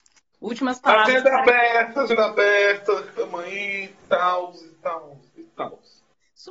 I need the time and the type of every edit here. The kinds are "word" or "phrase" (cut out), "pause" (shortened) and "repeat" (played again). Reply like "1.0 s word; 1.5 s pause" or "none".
5.3 s pause